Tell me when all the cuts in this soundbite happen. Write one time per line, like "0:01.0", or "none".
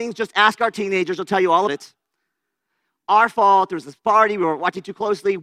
0:01.7